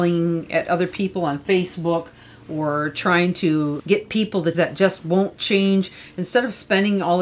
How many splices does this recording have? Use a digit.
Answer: 2